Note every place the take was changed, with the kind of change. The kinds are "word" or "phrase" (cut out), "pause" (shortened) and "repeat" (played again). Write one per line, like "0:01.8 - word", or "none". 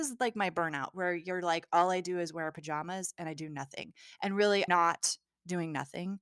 0:04.7 - word